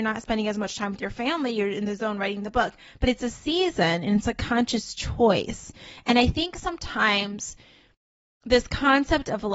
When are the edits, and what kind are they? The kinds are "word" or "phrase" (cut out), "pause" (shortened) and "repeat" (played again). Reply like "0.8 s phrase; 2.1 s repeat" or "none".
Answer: none